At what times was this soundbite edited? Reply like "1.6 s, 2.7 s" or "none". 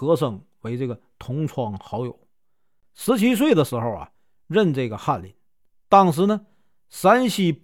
none